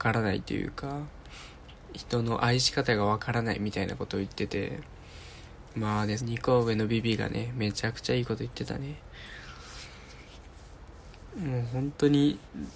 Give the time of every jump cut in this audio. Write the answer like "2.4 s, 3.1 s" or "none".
6.2 s

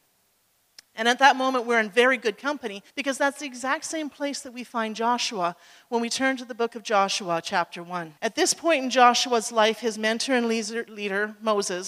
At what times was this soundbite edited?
2.9 s, 8.2 s

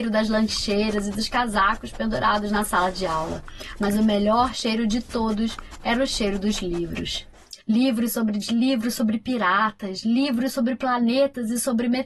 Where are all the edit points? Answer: 7.6 s, 8.4 s

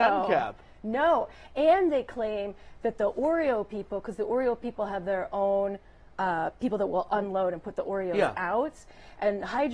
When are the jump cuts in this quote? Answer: none

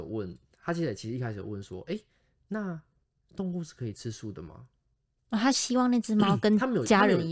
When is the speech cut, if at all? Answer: 3.0 s

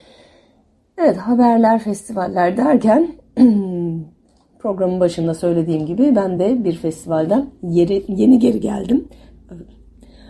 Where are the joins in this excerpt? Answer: none

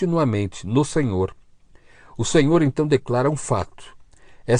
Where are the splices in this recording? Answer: none

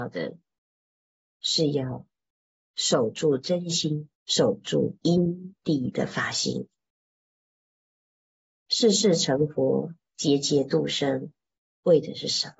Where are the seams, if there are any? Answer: 4.1 s

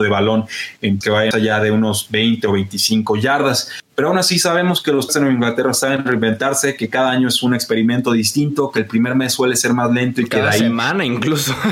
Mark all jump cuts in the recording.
1.0 s, 1.3 s, 5.1 s

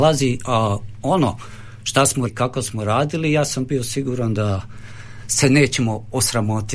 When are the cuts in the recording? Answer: 2.3 s

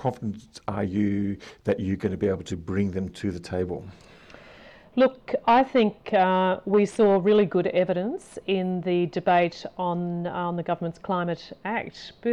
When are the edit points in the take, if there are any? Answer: none

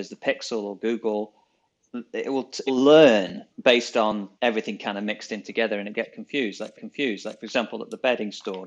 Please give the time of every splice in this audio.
2.7 s, 3.5 s, 4.4 s, 6.7 s

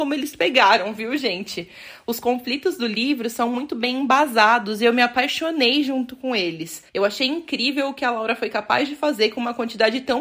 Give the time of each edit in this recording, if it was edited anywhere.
6.9 s

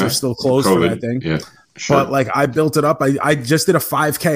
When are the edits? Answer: none

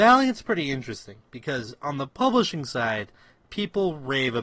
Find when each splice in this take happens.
none

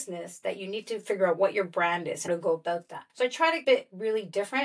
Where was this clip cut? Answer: 2.3 s, 3.1 s, 3.6 s

